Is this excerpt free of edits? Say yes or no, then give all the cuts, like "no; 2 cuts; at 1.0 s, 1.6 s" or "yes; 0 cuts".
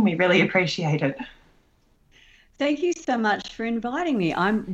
yes; 0 cuts